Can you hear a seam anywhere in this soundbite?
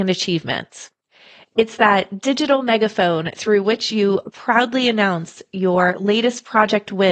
no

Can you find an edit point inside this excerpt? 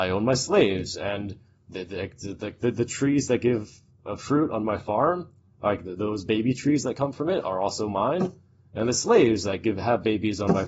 no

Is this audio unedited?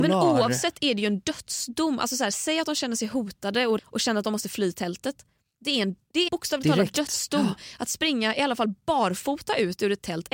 no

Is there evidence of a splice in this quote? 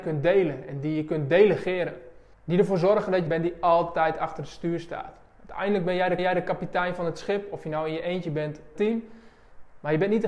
yes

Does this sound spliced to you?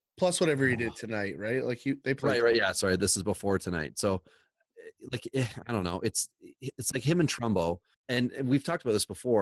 yes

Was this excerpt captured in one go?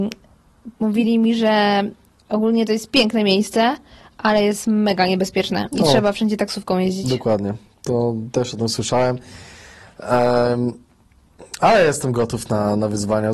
yes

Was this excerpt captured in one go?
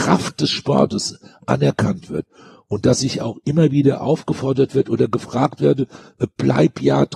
yes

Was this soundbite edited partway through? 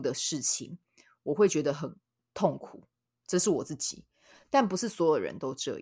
yes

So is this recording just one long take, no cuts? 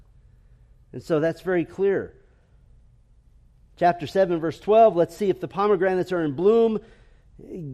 yes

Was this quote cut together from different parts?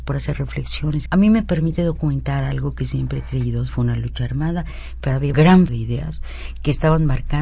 yes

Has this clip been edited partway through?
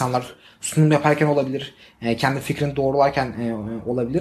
no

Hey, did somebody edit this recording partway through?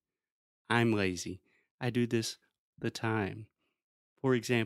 yes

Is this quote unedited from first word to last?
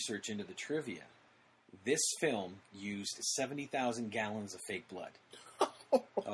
no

